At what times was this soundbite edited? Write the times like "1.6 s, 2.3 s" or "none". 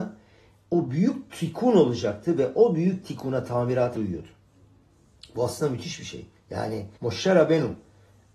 3.9 s, 6.9 s